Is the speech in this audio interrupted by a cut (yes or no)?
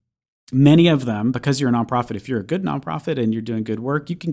no